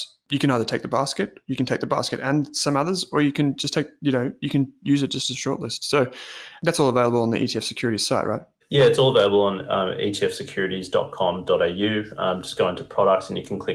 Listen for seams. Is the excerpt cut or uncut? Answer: uncut